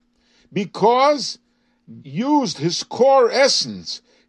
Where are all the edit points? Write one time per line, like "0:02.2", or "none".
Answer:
0:02.0